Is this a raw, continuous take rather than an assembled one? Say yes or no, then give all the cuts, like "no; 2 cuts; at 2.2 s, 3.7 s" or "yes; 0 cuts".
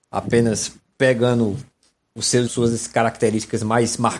no; 1 cut; at 2.5 s